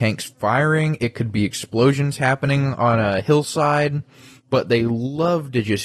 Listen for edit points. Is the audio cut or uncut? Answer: cut